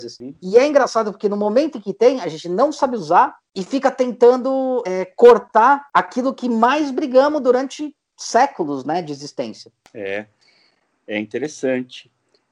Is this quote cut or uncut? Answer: cut